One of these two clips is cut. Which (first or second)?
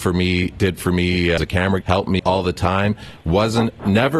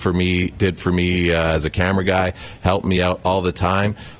first